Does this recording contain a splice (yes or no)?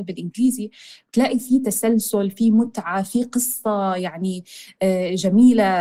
no